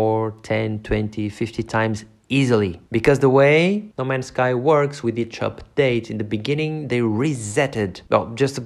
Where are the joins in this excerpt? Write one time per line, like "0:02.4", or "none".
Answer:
0:02.9

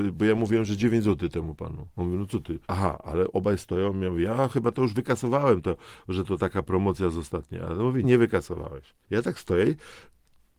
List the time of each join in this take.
0:01.9
0:02.6
0:08.0
0:09.0

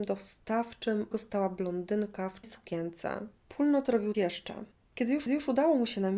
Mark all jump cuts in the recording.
0:01.1
0:02.4
0:03.4
0:04.1
0:04.7
0:05.3

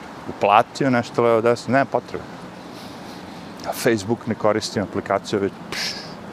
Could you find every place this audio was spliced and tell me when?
none

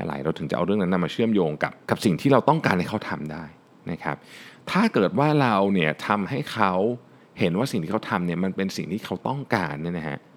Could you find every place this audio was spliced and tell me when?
0:01.8

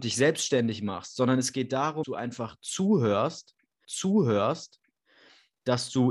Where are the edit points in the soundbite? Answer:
0:02.0
0:03.8

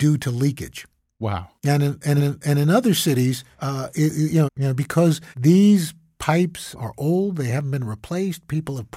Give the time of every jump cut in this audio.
0:01.6
0:02.2
0:03.5
0:04.5
0:05.3
0:06.7

